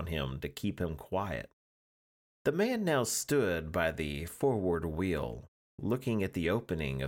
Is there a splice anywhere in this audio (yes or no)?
no